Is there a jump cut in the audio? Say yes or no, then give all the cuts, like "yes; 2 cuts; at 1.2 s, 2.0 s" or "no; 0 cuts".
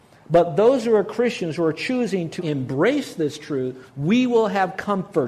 yes; 2 cuts; at 2.4 s, 3.9 s